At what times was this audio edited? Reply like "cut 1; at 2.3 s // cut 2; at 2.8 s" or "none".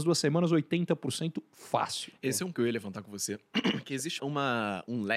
cut 1; at 2.5 s // cut 2; at 4.2 s